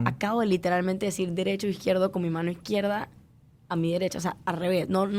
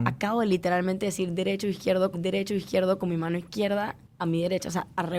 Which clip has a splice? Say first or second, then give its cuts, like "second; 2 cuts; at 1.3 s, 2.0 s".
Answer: second; 2 cuts; at 2.1 s, 4.0 s